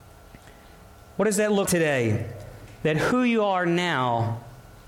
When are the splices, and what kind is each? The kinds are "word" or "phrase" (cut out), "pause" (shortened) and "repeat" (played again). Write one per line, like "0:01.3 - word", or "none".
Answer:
0:01.7 - word